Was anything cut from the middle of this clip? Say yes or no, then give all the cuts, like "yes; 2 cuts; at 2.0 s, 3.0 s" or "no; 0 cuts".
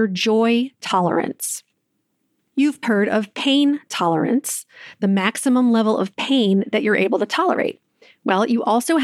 yes; 1 cut; at 2.8 s